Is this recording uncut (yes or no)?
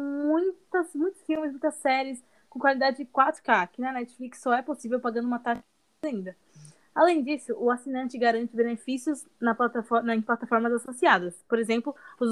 yes